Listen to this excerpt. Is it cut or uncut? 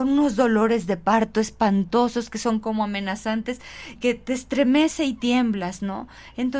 cut